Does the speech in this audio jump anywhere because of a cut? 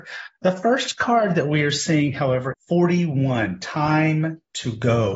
yes; 1 cut; at 2.5 s

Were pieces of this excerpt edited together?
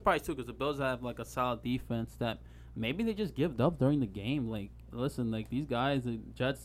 no; 0 cuts

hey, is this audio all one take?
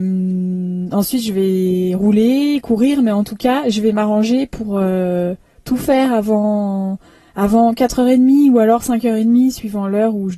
yes; 0 cuts

